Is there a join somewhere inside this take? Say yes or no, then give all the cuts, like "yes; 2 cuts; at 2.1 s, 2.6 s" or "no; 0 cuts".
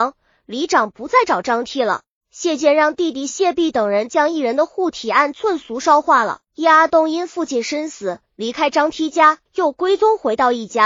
yes; 4 cuts; at 2.2 s, 6.4 s, 8.3 s, 9.5 s